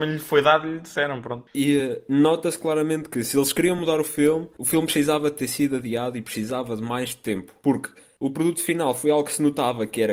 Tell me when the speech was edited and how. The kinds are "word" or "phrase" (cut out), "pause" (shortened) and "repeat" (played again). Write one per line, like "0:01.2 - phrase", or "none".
none